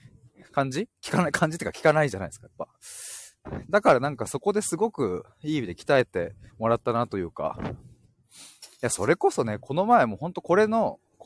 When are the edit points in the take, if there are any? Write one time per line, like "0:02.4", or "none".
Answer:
0:05.3
0:06.5